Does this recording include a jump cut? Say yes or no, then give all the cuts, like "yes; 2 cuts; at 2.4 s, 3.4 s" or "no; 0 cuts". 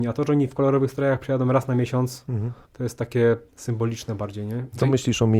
yes; 2 cuts; at 2.6 s, 3.5 s